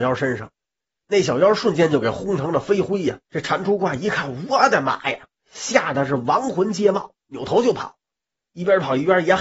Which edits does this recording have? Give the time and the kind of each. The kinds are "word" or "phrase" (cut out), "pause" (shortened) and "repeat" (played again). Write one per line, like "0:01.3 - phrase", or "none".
0:03.2 - pause